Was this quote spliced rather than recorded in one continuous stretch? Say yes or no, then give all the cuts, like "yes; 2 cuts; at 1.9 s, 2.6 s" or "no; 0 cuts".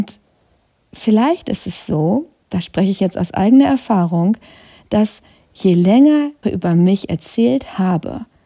yes; 1 cut; at 6.4 s